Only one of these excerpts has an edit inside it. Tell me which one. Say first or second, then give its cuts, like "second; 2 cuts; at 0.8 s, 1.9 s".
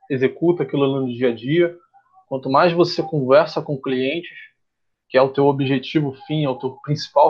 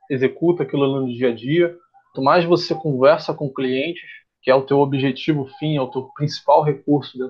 second; 2 cuts; at 2.1 s, 4.2 s